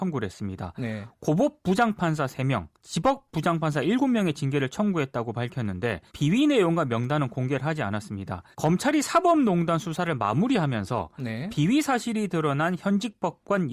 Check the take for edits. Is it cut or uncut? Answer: cut